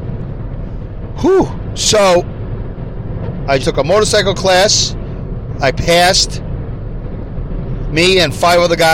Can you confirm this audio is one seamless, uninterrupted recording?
no; 1 cut; at 3.6 s

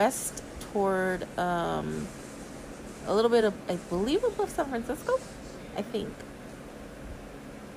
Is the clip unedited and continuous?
yes; 0 cuts

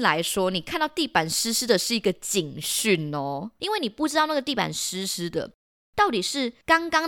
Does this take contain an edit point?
no; 0 cuts

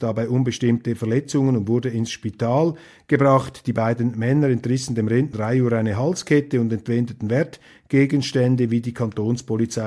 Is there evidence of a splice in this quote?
yes; 1 cut; at 5.3 s

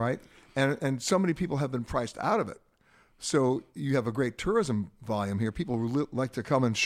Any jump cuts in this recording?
no; 0 cuts

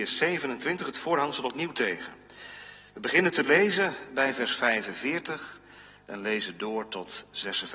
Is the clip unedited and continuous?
yes; 0 cuts

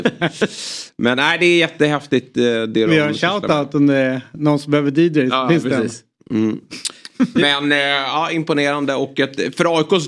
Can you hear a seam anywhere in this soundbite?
no; 0 cuts

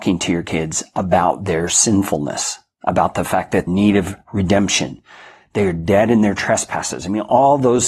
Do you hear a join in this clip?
yes; 1 cut; at 3.7 s

